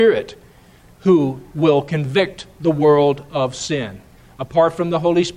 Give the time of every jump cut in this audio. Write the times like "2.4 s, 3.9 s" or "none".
none